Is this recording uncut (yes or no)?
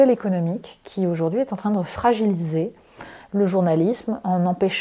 yes